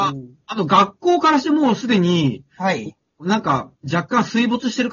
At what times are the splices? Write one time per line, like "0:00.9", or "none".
0:03.8